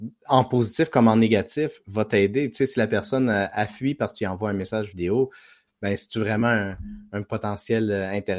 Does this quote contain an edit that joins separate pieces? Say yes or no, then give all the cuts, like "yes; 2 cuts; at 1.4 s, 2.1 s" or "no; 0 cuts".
no; 0 cuts